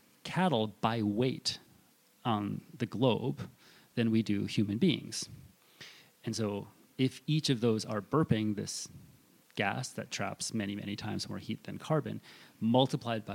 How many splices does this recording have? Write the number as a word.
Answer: zero